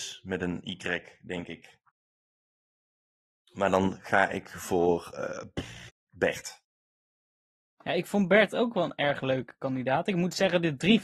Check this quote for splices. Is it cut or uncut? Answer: uncut